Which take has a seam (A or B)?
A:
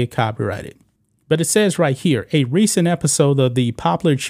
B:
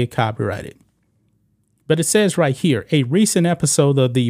A